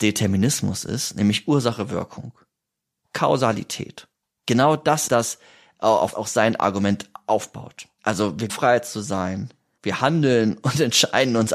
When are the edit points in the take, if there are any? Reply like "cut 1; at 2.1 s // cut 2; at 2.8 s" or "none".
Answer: cut 1; at 5.1 s // cut 2; at 6.1 s // cut 3; at 8.5 s // cut 4; at 9.8 s